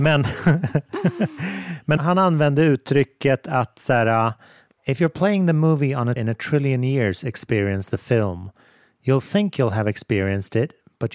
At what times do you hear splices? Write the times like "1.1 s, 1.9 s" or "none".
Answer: 2.0 s, 6.2 s